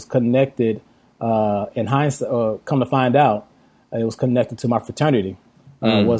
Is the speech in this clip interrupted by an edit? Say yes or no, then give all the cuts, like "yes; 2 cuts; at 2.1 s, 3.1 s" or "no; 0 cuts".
no; 0 cuts